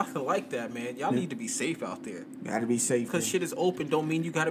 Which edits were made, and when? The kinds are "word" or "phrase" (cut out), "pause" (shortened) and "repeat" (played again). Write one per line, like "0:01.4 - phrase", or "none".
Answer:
0:03.1 - word